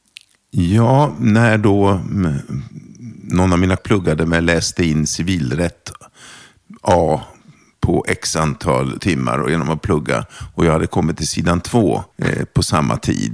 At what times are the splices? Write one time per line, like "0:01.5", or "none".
0:03.8
0:09.0
0:12.1

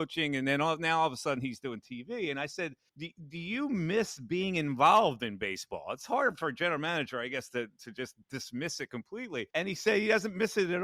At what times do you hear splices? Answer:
0:02.9
0:08.2
0:09.5

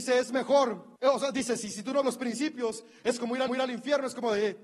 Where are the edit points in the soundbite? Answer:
0:01.0
0:02.0
0:03.5

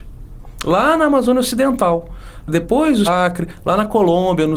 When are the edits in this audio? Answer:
0:03.1

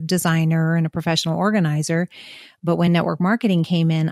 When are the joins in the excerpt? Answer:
none

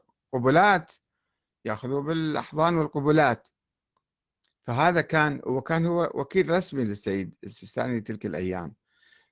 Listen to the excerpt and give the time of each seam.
none

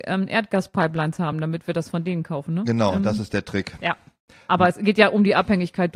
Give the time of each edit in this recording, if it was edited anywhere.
none

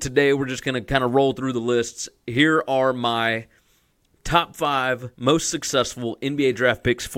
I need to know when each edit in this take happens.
0:05.1

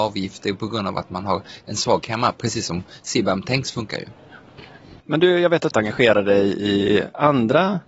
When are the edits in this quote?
0:02.0
0:05.0
0:05.7

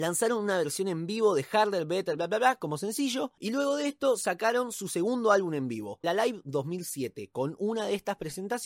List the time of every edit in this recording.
0:02.2
0:06.0

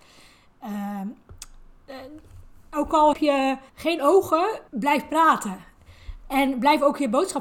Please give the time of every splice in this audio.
0:03.1
0:03.7
0:04.7

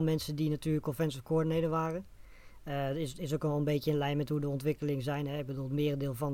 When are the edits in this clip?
none

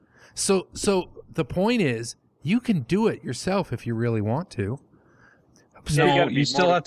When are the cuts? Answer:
none

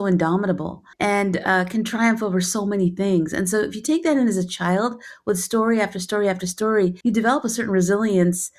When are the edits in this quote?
0:00.9
0:07.0

